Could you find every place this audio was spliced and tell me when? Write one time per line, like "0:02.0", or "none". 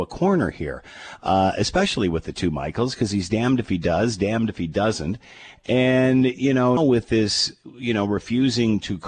0:06.8